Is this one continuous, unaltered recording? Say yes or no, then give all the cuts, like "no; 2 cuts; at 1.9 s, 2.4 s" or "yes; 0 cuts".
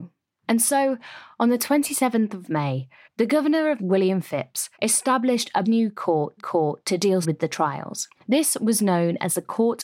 no; 7 cuts; at 3.0 s, 3.8 s, 4.7 s, 5.6 s, 6.4 s, 7.2 s, 8.1 s